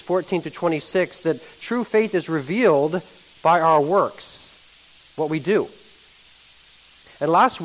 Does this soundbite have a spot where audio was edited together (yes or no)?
no